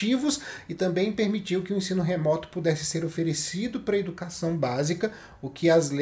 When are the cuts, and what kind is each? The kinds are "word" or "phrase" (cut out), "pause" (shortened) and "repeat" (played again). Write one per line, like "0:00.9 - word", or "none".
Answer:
none